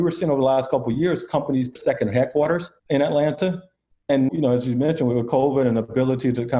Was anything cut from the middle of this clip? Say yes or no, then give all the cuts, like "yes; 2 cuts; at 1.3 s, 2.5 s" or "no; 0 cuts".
yes; 3 cuts; at 1.8 s, 2.8 s, 4.3 s